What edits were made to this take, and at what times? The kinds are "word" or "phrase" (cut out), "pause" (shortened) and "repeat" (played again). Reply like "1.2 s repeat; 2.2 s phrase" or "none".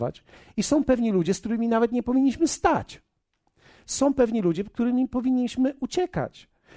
none